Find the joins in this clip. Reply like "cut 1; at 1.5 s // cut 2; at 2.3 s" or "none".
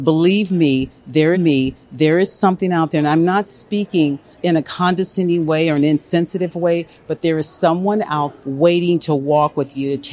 cut 1; at 1.3 s // cut 2; at 4.4 s // cut 3; at 8.4 s